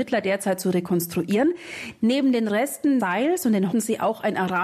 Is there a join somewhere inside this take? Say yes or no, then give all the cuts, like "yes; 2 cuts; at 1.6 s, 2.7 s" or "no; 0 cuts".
yes; 2 cuts; at 3.0 s, 3.7 s